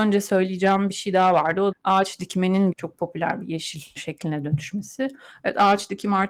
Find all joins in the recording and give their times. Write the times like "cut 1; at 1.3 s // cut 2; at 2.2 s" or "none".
cut 1; at 1.7 s // cut 2; at 2.7 s // cut 3; at 4.0 s